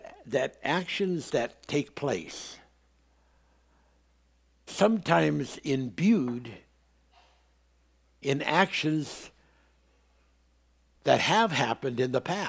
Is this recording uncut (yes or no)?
no